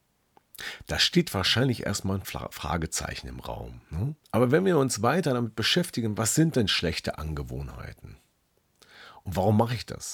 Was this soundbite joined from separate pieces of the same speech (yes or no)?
yes